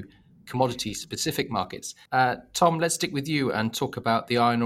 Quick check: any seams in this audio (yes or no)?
yes